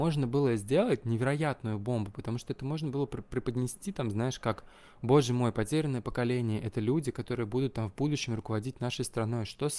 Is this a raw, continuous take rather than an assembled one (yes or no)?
yes